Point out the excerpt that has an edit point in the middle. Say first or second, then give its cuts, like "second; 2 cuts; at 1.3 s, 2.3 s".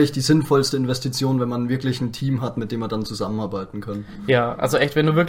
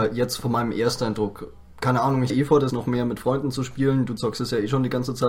second; 2 cuts; at 2.3 s, 2.7 s